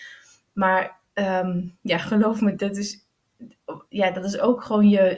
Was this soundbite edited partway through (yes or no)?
yes